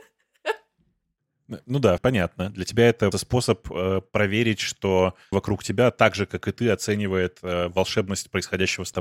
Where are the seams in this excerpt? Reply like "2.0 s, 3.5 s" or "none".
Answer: 2.0 s, 3.1 s, 5.3 s